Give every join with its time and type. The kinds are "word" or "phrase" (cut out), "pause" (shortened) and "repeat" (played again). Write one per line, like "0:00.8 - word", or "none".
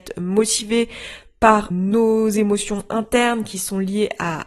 0:01.7 - word